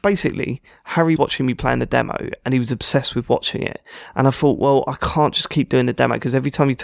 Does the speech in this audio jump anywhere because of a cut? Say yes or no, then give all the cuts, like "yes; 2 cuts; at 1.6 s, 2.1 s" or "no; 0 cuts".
yes; 1 cut; at 1.2 s